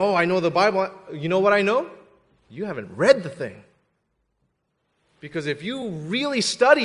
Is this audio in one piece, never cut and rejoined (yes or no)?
yes